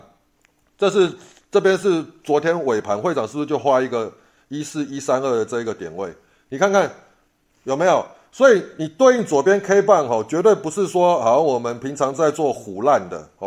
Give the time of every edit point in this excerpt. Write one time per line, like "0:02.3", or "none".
none